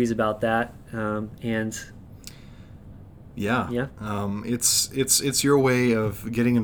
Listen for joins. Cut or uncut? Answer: uncut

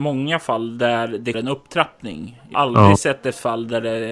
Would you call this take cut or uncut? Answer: cut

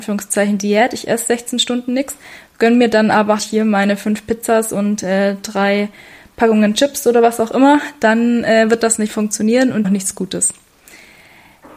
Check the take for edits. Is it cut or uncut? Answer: cut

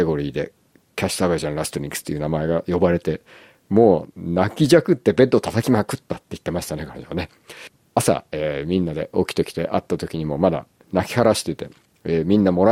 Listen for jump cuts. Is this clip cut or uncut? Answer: uncut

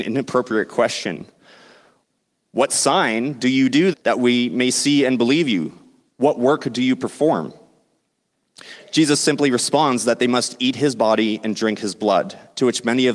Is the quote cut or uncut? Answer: cut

